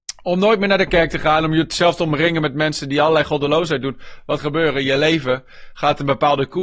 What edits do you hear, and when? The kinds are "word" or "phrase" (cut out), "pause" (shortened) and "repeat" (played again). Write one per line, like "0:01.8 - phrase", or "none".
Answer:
0:04.4 - word